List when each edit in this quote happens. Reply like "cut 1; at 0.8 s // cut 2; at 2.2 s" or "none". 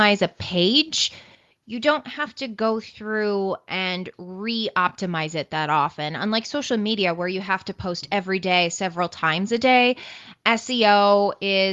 none

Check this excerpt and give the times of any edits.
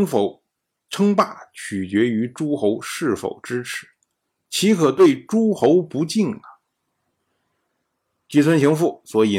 none

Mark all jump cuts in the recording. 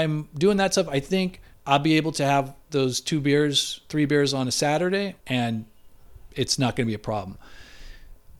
cut 1; at 1.5 s // cut 2; at 2.6 s // cut 3; at 5.2 s

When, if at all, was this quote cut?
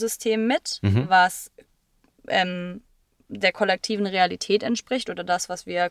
none

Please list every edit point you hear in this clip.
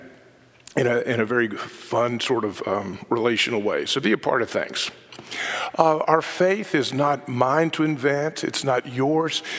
none

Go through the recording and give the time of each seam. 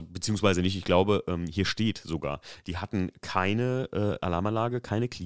none

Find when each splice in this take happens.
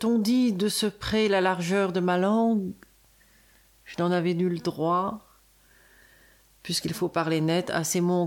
none

